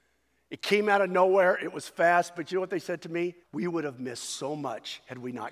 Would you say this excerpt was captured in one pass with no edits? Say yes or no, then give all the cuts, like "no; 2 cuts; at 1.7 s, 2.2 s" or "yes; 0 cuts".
no; 1 cut; at 3.4 s